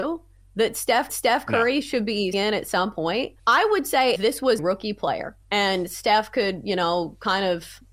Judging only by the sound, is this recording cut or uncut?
cut